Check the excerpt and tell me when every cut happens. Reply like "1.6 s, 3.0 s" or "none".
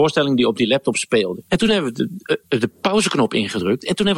1.5 s